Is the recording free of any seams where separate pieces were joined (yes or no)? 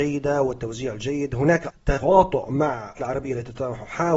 no